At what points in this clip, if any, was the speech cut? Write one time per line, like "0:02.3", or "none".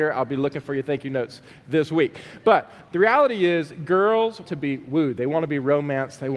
0:02.8
0:04.5